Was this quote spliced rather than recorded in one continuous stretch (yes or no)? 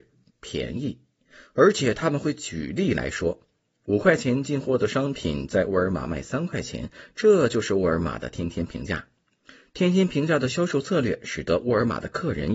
no